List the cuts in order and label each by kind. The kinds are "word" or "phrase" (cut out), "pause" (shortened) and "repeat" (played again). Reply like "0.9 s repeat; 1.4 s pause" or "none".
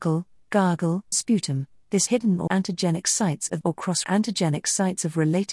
1.1 s word; 2.1 s phrase; 2.5 s word; 3.6 s phrase; 4.0 s word